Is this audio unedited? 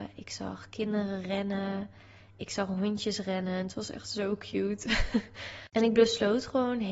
yes; 0 cuts

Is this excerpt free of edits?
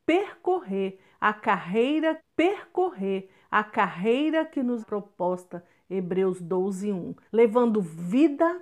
no; 3 cuts; at 2.2 s, 4.8 s, 7.3 s

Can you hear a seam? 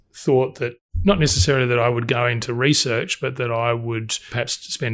no; 0 cuts

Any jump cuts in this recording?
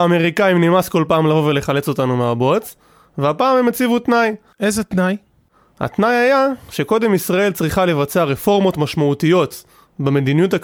no; 0 cuts

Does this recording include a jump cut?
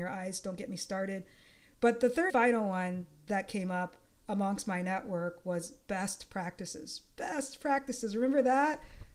yes; 1 cut; at 2.3 s

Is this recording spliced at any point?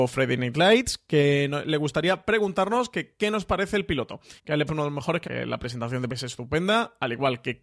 yes; 4 cuts; at 4.4 s, 4.7 s, 5.2 s, 6.1 s

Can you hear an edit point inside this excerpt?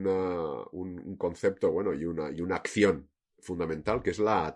no; 0 cuts

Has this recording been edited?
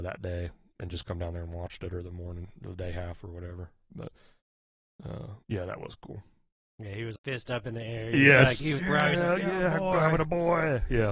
yes; 3 cuts; at 5.4 s, 7.2 s, 8.8 s

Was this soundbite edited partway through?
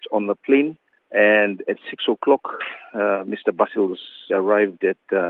yes; 1 cut; at 4.3 s

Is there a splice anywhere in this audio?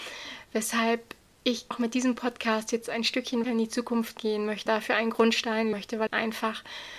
yes; 5 cuts; at 1.7 s, 3.4 s, 4.7 s, 5.7 s, 6.1 s

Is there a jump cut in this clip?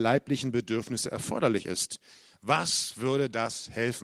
no; 0 cuts

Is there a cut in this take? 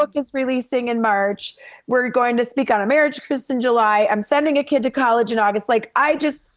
no; 0 cuts

